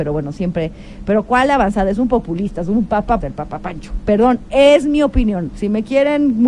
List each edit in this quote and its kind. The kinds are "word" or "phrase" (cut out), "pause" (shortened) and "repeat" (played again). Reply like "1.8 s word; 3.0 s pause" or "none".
3.2 s word